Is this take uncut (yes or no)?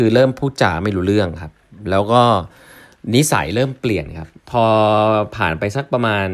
no